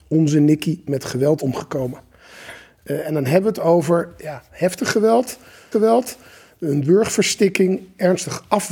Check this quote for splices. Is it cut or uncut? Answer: cut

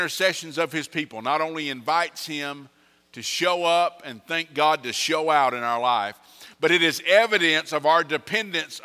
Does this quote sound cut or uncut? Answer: uncut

